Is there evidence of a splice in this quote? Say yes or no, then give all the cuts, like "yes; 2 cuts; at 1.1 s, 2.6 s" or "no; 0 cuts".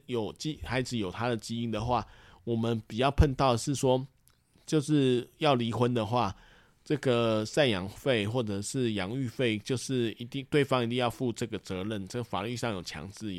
no; 0 cuts